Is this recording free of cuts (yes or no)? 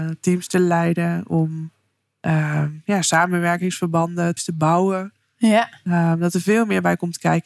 no